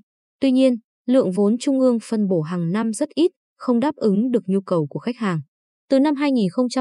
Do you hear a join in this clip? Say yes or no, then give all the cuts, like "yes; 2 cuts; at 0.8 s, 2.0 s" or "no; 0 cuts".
no; 0 cuts